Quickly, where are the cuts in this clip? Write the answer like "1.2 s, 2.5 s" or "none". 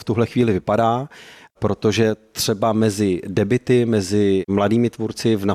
none